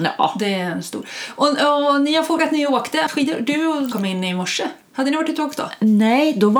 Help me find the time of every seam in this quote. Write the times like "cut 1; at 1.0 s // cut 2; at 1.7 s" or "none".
cut 1; at 2.4 s // cut 2; at 3.1 s // cut 3; at 3.9 s

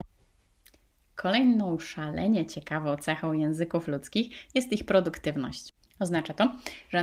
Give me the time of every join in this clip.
cut 1; at 5.8 s

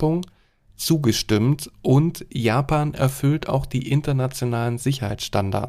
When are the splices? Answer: none

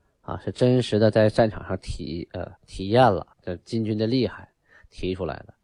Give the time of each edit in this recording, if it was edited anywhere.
cut 1; at 2.6 s // cut 2; at 3.3 s

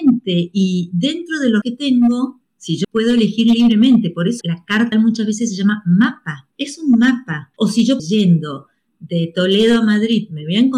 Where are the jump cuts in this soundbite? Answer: cut 1; at 1.6 s // cut 2; at 2.4 s // cut 3; at 2.8 s // cut 4; at 4.4 s // cut 5; at 4.9 s // cut 6; at 6.5 s // cut 7; at 7.5 s // cut 8; at 8.0 s

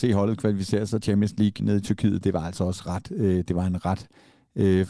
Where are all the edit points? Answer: cut 1; at 1.0 s // cut 2; at 1.6 s

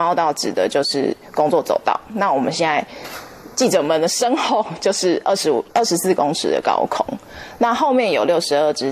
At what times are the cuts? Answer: cut 1; at 5.7 s

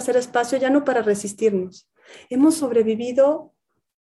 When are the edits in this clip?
none

